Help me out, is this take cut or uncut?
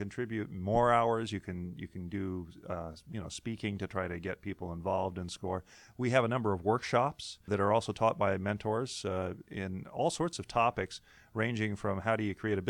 cut